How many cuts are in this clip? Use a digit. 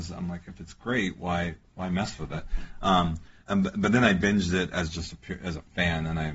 1